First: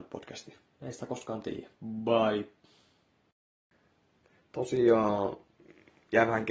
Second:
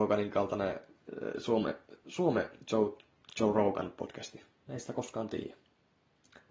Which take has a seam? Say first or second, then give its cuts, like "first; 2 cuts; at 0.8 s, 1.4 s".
first; 1 cut; at 1.8 s